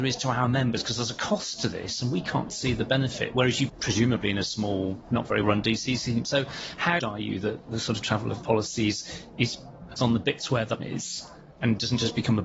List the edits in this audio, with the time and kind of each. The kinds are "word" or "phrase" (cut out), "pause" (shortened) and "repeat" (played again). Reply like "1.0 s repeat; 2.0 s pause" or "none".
2.5 s word; 3.7 s word; 5.4 s word; 7.0 s word; 8.0 s word; 8.4 s word; 10.0 s word; 10.8 s word